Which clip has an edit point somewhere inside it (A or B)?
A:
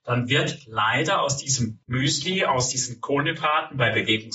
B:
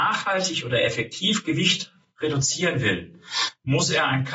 A